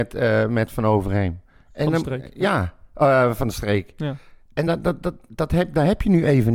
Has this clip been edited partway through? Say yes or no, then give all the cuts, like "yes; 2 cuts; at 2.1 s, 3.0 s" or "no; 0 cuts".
no; 0 cuts